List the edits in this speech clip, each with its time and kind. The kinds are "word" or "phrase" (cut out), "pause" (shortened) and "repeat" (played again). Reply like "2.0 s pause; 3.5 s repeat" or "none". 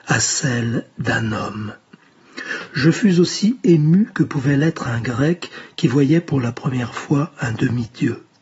none